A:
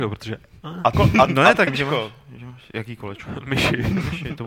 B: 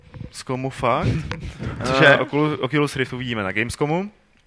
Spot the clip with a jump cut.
A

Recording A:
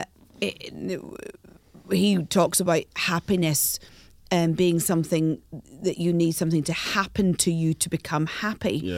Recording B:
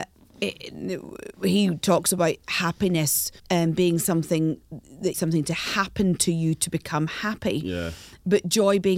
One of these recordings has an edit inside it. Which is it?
B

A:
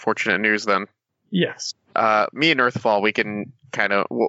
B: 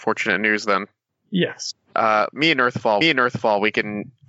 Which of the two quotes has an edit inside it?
B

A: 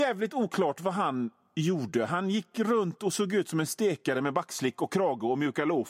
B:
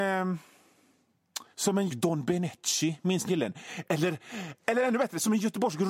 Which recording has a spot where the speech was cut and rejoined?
B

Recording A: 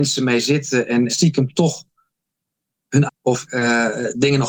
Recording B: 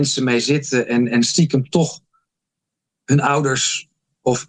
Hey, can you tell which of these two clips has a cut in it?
A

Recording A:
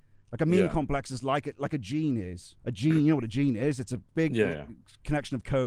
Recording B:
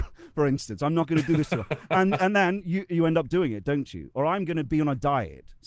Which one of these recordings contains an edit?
A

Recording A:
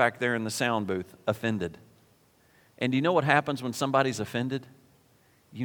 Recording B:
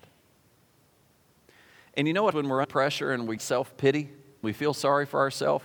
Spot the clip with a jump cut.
B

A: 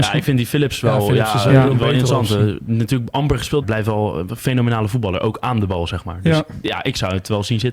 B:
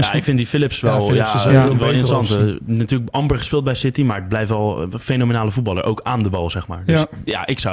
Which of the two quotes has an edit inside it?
A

